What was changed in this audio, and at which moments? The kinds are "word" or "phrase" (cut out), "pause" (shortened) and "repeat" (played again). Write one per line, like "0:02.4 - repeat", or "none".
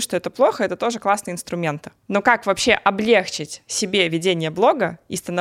none